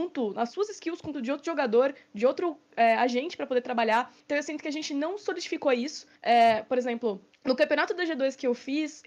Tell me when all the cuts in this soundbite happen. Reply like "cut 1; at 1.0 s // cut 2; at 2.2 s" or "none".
cut 1; at 1.1 s // cut 2; at 4.2 s // cut 3; at 6.2 s // cut 4; at 7.3 s